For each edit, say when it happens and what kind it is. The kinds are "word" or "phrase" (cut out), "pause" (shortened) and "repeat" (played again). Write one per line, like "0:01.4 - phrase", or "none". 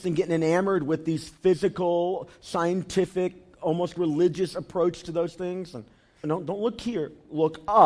0:06.2 - word